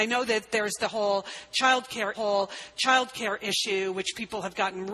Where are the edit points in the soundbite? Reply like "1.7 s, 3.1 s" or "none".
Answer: 2.1 s